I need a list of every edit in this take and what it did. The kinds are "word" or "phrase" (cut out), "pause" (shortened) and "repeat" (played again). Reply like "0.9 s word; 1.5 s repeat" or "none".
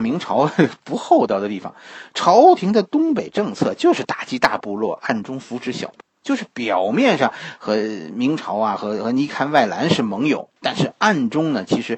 6.0 s word; 10.6 s pause

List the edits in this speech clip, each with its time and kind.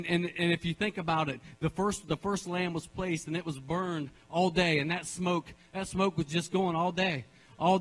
none

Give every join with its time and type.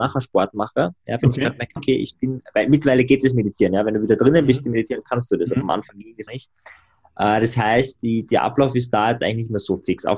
1.8 s word; 6.3 s word

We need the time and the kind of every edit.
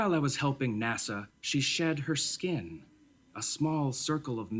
1.3 s pause

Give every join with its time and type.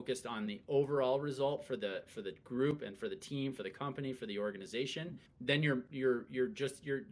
5.3 s pause

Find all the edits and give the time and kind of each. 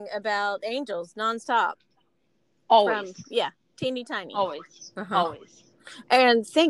none

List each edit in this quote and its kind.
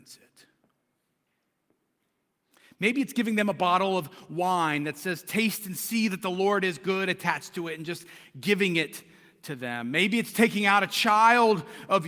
none

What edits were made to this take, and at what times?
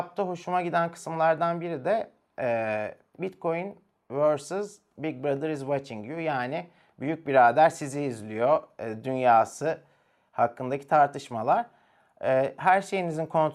none

